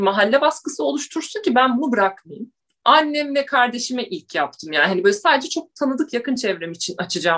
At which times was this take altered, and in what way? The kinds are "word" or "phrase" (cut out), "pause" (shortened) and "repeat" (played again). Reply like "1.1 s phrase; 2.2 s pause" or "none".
none